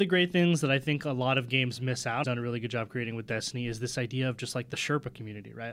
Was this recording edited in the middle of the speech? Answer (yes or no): yes